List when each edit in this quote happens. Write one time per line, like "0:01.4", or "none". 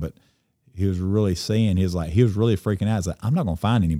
none